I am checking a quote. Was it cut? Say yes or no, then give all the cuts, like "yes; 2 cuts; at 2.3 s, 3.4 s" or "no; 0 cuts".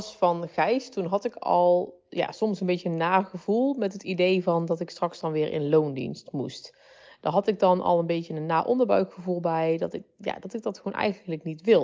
no; 0 cuts